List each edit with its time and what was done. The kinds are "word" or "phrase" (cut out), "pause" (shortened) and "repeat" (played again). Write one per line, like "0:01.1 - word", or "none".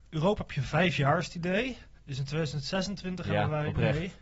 0:02.0 - pause